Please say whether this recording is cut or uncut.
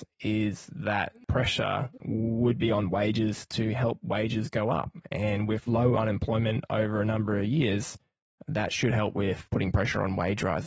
uncut